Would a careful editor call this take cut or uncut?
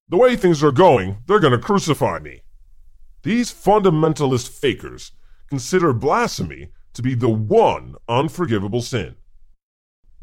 uncut